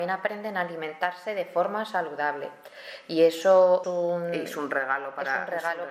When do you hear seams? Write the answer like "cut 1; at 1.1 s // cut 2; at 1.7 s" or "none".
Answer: cut 1; at 3.8 s